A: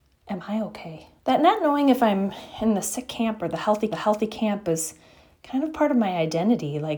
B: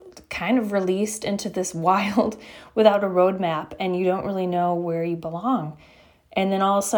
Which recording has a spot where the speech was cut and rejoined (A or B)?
A